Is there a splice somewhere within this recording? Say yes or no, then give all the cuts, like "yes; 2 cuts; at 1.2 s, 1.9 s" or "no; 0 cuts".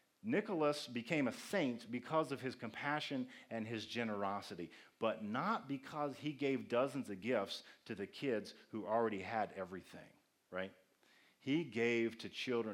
no; 0 cuts